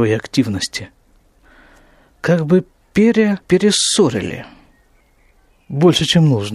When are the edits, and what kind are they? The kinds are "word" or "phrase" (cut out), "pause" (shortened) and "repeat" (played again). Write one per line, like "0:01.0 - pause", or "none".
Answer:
0:03.4 - pause